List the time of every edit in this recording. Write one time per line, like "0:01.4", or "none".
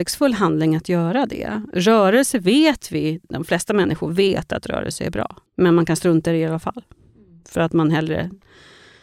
0:05.5